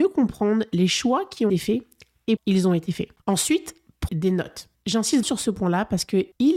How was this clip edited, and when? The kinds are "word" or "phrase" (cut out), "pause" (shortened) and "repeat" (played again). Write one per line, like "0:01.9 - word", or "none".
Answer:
0:01.5 - word
0:02.4 - word
0:04.1 - word
0:05.2 - word